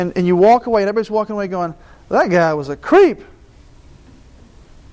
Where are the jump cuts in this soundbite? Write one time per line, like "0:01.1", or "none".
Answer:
none